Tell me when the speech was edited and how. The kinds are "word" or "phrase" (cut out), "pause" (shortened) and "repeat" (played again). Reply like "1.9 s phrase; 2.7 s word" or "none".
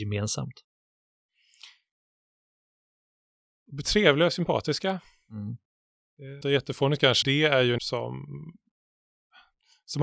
6.4 s word; 7.2 s word; 7.8 s word